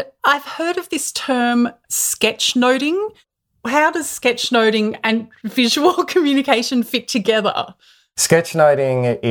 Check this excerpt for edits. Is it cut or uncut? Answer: uncut